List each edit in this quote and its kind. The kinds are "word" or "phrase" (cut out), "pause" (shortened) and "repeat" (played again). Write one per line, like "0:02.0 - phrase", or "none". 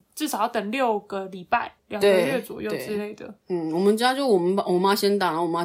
0:01.8 - pause